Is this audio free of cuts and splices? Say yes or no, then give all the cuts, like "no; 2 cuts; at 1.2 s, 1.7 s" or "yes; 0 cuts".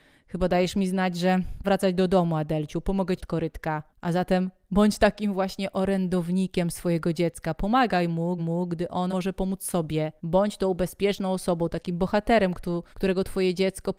no; 7 cuts; at 1.6 s, 3.2 s, 3.9 s, 8.4 s, 9.1 s, 10.2 s, 12.9 s